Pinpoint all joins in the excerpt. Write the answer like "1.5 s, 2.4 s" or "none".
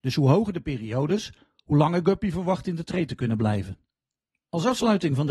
none